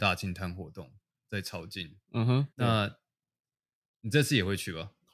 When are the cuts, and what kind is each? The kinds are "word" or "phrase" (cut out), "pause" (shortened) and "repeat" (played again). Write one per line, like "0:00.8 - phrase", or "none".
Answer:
0:02.5 - pause